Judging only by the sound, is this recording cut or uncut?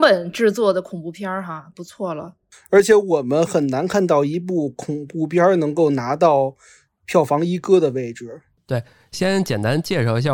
uncut